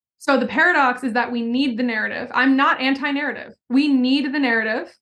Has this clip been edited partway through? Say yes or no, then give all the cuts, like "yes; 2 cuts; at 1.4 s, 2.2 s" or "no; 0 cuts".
no; 0 cuts